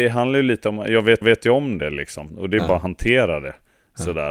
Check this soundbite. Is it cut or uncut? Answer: cut